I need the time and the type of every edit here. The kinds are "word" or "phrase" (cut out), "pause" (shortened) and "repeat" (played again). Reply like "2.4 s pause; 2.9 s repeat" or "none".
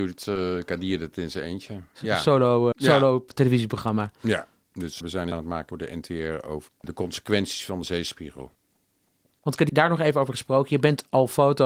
2.7 s word; 5.0 s word; 5.3 s word; 5.7 s word; 6.7 s word; 7.8 s word; 9.7 s word